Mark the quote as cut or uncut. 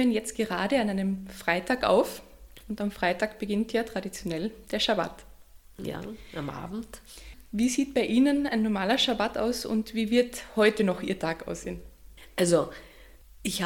uncut